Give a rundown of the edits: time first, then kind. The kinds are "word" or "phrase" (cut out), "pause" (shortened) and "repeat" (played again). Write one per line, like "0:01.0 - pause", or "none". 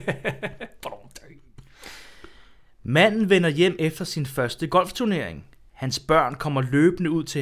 none